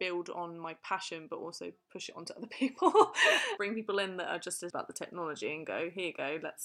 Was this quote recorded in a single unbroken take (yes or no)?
no